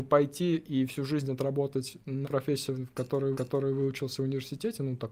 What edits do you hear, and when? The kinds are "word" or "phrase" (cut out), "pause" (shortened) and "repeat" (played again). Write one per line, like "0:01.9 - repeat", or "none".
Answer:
0:02.2 - word
0:03.3 - repeat